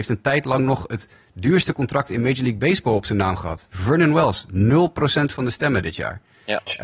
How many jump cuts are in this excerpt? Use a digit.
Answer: 0